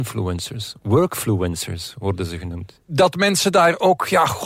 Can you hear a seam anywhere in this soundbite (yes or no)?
no